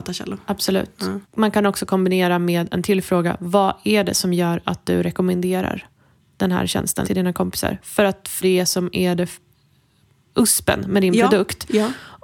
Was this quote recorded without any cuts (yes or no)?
no